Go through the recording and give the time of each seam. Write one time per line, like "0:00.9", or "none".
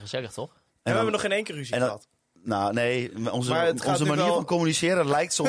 none